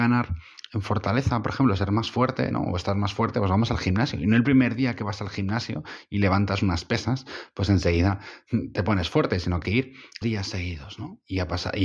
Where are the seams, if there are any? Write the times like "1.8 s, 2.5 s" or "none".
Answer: 9.6 s, 10.2 s